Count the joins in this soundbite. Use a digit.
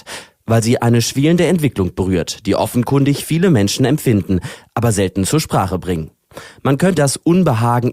1